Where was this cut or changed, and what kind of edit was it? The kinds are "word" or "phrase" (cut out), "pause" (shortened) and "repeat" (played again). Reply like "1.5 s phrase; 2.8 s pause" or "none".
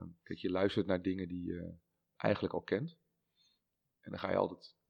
none